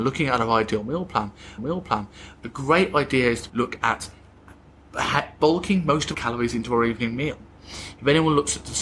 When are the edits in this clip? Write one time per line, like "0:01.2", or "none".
0:01.6
0:03.5
0:06.1

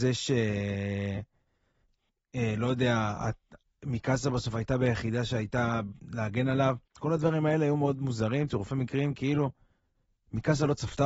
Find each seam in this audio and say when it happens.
0:06.9

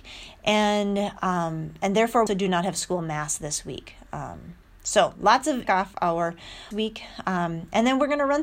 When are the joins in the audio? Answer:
0:02.3
0:05.6
0:06.7

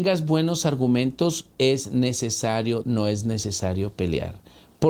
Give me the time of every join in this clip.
0:01.5
0:02.8

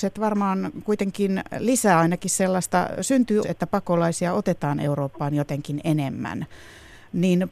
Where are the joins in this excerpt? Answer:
0:03.4

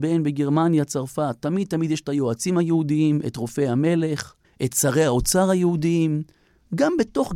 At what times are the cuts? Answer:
0:04.4

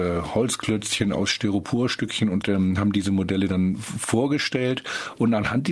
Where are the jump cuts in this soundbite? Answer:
0:02.4

